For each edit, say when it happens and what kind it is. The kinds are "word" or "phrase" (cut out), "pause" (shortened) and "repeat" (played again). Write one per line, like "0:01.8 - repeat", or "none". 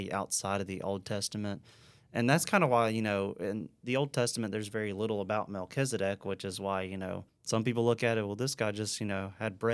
0:07.3 - pause